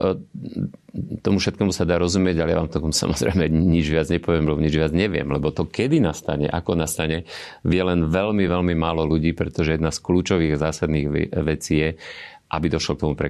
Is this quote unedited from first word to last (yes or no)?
yes